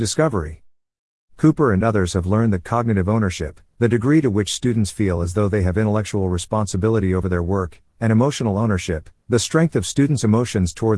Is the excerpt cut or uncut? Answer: uncut